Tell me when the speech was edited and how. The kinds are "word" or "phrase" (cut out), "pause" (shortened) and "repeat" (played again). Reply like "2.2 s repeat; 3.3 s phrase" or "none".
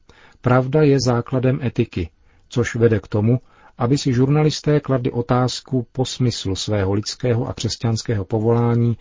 none

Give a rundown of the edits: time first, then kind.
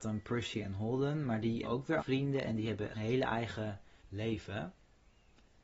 1.6 s word; 2.0 s word; 2.9 s phrase; 4.0 s pause

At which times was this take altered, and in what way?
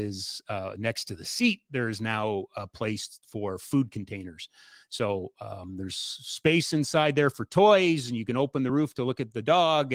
none

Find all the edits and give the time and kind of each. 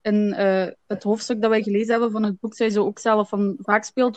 none

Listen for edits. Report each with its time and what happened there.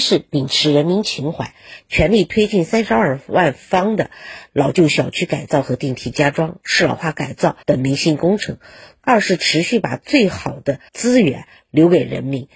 7.6 s pause; 10.9 s pause

